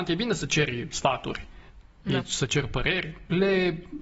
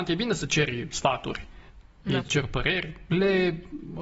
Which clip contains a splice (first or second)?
second